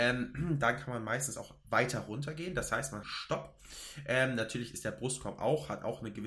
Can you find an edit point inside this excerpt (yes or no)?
yes